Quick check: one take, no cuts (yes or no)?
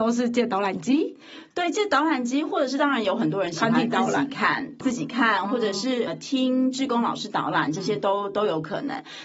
no